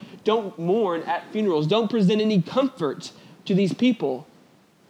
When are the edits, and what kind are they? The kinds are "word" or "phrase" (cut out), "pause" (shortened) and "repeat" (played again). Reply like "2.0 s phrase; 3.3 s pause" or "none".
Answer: none